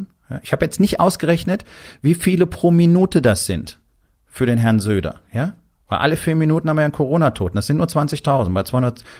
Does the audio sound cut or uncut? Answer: uncut